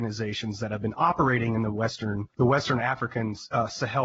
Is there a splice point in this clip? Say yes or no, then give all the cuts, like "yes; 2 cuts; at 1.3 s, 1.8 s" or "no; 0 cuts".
yes; 1 cut; at 2.3 s